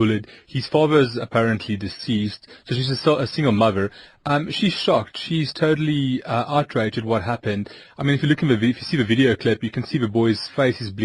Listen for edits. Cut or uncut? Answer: uncut